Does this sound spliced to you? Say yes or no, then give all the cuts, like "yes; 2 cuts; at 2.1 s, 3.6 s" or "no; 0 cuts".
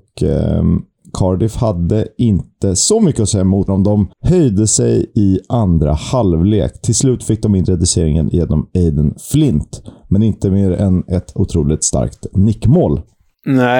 yes; 2 cuts; at 3.7 s, 4.1 s